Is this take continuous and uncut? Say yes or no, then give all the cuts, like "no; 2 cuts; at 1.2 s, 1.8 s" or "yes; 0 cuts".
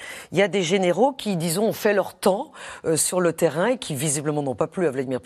yes; 0 cuts